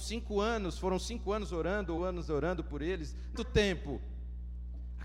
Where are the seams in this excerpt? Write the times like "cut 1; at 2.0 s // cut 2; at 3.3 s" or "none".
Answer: cut 1; at 2.0 s // cut 2; at 3.4 s